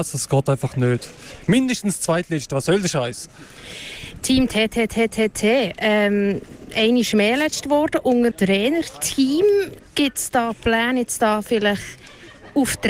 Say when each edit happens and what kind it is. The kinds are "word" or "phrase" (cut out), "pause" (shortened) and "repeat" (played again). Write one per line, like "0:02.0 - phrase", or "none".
0:08.3 - phrase